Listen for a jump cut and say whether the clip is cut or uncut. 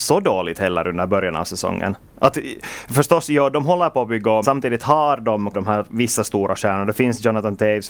cut